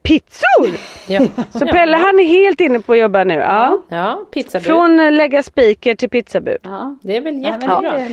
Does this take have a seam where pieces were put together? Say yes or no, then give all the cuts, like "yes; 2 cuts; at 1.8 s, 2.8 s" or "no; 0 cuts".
no; 0 cuts